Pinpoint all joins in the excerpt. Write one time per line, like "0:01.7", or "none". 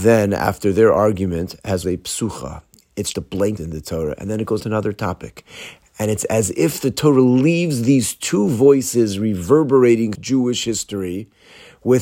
0:01.8
0:03.1
0:03.6
0:04.6
0:10.1